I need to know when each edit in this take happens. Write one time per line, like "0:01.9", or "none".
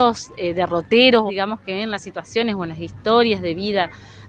0:01.3